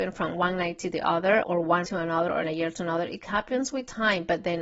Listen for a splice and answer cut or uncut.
cut